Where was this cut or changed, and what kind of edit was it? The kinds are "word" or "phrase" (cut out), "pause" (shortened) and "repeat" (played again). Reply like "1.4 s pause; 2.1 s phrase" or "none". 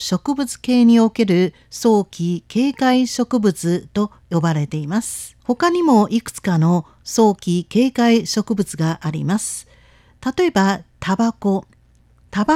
1.6 s pause; 5.4 s pause

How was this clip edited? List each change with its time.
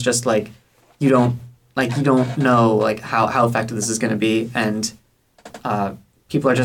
none

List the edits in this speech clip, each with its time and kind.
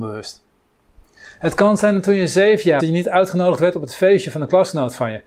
2.8 s word

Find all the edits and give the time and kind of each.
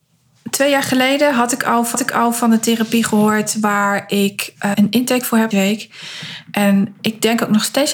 1.9 s repeat; 4.7 s word; 5.5 s phrase

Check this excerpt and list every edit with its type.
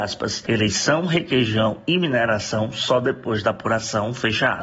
none

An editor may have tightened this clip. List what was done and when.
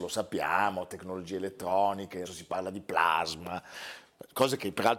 2.2 s word

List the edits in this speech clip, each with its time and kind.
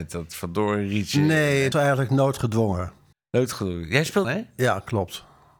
1.7 s word; 3.1 s pause; 4.2 s word

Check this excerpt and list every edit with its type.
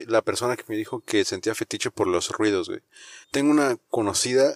3.2 s pause

